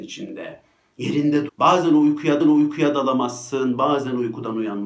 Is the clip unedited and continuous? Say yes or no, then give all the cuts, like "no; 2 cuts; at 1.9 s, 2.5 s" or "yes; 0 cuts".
no; 2 cuts; at 1.5 s, 2.4 s